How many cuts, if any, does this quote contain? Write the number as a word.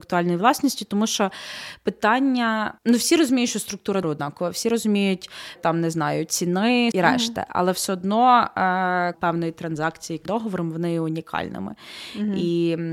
six